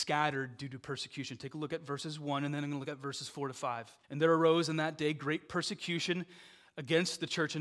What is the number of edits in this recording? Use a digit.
1